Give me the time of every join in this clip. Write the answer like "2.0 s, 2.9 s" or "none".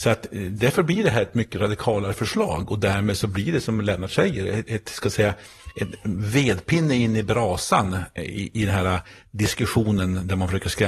6.2 s